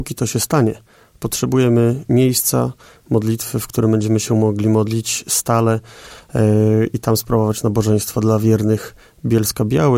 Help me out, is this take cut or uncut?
uncut